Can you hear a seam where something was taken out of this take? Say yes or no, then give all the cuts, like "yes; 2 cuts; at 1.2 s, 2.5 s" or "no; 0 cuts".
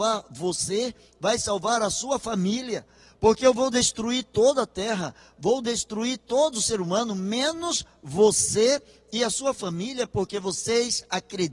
no; 0 cuts